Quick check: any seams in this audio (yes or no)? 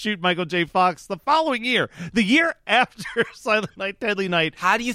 no